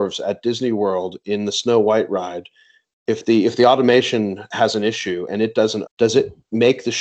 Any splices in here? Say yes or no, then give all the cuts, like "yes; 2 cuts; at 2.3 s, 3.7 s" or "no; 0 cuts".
yes; 1 cut; at 5.9 s